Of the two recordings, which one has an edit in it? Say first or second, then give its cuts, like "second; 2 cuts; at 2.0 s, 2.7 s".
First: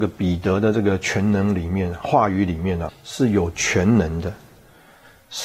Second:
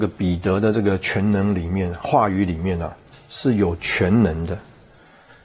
first; 1 cut; at 2.9 s